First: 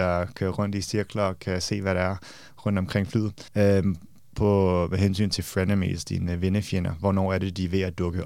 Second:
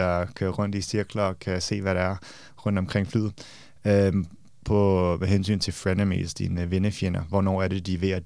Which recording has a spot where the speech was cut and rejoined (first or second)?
first